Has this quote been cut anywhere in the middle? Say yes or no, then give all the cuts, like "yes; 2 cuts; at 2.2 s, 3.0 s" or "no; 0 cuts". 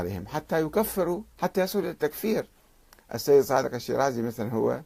yes; 1 cut; at 1.3 s